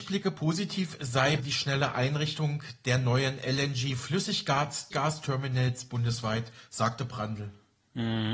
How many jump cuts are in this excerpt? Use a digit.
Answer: 2